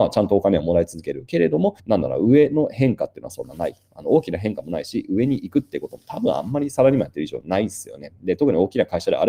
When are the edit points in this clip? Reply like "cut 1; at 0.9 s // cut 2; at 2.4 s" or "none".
cut 1; at 1.8 s